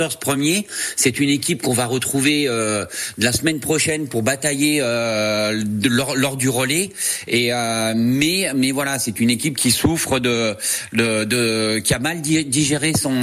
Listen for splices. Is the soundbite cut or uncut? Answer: uncut